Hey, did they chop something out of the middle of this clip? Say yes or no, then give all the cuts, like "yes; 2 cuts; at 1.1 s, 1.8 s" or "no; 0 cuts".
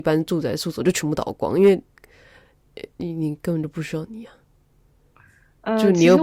no; 0 cuts